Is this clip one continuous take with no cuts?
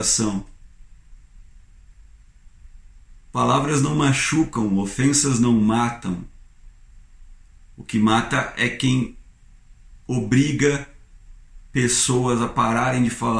yes; 0 cuts

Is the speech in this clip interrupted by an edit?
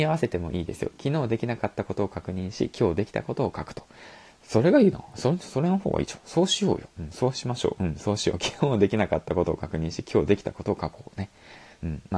no; 0 cuts

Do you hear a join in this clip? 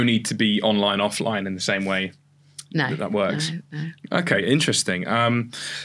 no; 0 cuts

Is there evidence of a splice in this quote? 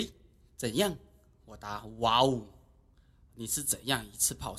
no; 0 cuts

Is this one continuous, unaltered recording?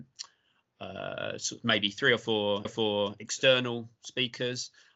no; 1 cut; at 2.7 s

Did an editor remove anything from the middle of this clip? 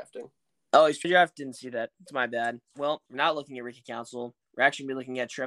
yes; 2 cuts; at 1.0 s, 3.1 s

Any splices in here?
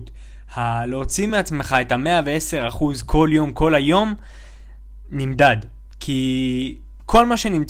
no; 0 cuts

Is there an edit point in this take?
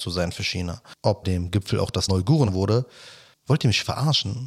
yes; 3 cuts; at 1.2 s, 2.1 s, 2.5 s

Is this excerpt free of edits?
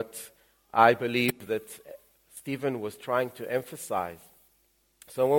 yes; 0 cuts

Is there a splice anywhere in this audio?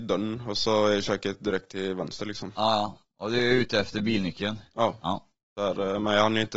no; 0 cuts

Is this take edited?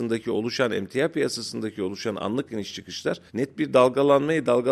yes; 1 cut; at 3.3 s

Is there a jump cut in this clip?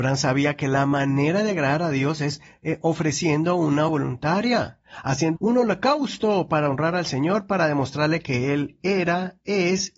yes; 2 cuts; at 3.9 s, 5.4 s

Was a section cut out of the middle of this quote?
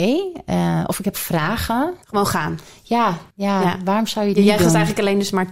yes; 2 cuts; at 2.0 s, 3.3 s

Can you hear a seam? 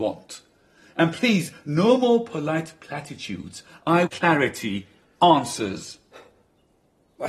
yes; 1 cut; at 4.1 s

